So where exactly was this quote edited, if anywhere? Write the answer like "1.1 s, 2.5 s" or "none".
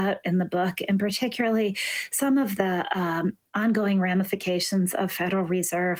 none